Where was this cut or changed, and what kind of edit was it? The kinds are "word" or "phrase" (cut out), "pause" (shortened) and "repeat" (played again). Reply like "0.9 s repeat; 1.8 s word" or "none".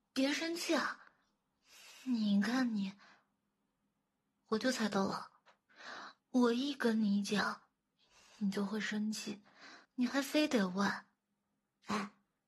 6.2 s pause; 9.8 s pause